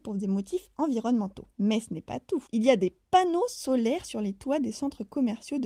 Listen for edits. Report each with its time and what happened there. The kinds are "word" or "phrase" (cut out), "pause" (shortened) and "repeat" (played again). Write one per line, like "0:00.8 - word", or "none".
0:01.5 - pause
0:02.5 - pause